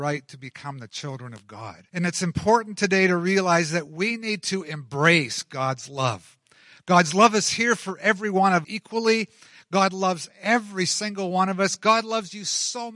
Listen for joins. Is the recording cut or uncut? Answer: cut